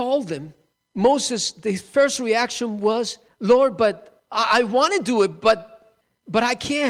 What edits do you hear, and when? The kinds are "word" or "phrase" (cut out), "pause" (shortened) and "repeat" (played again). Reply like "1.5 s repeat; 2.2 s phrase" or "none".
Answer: none